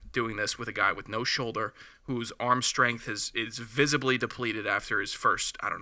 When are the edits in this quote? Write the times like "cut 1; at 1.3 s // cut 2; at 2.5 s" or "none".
none